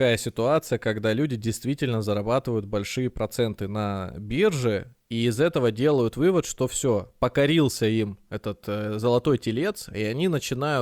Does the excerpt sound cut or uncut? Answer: uncut